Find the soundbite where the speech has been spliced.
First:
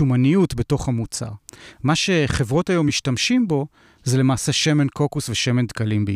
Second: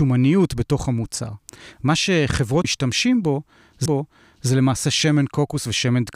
second; 2 cuts; at 2.6 s, 3.9 s

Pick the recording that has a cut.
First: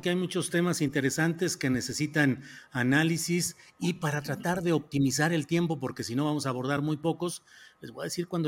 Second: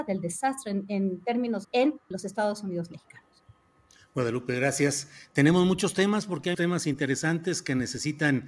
second; 3 cuts; at 1.6 s, 2.1 s, 6.5 s

